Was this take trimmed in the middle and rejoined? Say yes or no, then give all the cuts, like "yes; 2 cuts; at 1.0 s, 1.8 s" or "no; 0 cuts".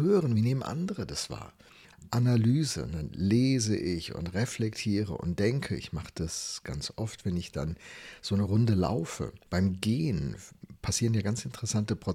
no; 0 cuts